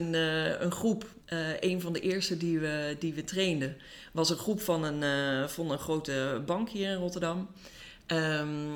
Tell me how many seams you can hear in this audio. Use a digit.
1